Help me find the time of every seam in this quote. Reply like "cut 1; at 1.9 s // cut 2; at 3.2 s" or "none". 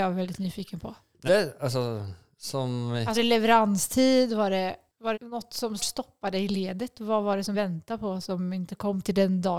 cut 1; at 1.3 s // cut 2; at 3.1 s // cut 3; at 5.1 s // cut 4; at 5.8 s // cut 5; at 7.5 s

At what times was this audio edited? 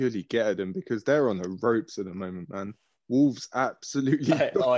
none

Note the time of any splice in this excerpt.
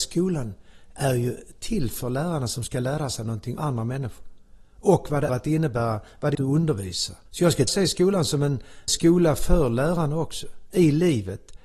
cut 1; at 3.6 s // cut 2; at 5.3 s // cut 3; at 6.3 s // cut 4; at 7.3 s // cut 5; at 7.7 s // cut 6; at 8.9 s

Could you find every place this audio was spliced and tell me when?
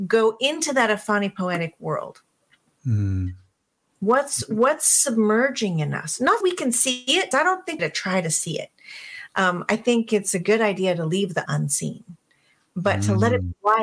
cut 1; at 2.5 s // cut 2; at 6.4 s // cut 3; at 7.3 s // cut 4; at 7.8 s // cut 5; at 11.5 s

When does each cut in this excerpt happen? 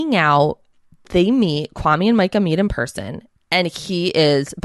none

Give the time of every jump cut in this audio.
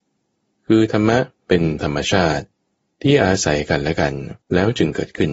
cut 1; at 1.4 s // cut 2; at 4.4 s

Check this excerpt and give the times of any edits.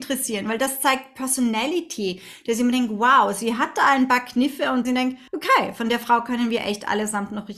cut 1; at 4.8 s // cut 2; at 5.3 s

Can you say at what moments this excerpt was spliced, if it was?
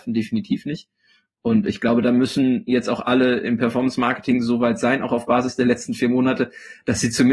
none

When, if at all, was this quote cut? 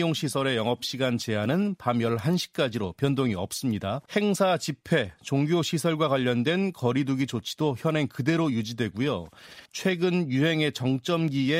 cut 1; at 4.1 s // cut 2; at 9.7 s

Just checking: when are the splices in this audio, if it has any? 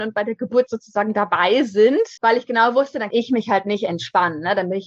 cut 1; at 2.2 s // cut 2; at 3.1 s

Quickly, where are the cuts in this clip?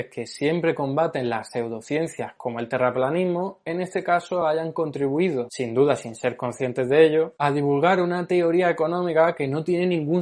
none

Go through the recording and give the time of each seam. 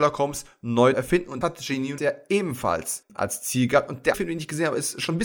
cut 1; at 0.9 s // cut 2; at 1.4 s // cut 3; at 2.0 s // cut 4; at 4.1 s

